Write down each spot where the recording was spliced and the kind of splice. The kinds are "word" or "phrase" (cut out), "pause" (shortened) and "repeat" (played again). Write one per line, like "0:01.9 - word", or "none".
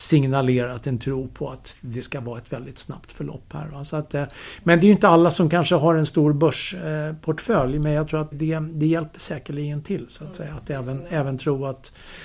0:08.3 - word